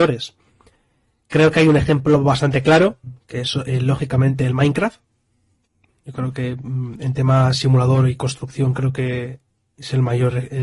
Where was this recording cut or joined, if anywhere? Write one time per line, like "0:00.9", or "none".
none